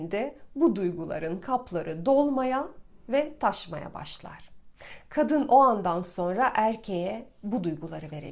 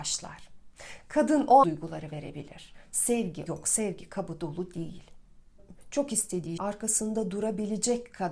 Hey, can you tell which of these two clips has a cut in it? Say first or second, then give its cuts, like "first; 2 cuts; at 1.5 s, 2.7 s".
second; 3 cuts; at 1.6 s, 3.5 s, 6.6 s